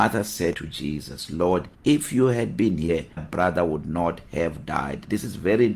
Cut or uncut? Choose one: cut